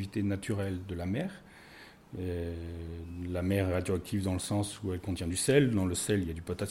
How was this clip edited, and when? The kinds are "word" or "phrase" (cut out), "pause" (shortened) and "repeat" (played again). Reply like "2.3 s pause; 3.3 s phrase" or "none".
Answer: none